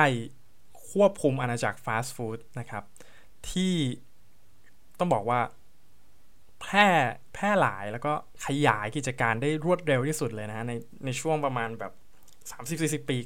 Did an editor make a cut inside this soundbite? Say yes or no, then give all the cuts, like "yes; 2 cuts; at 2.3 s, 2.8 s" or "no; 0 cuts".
no; 0 cuts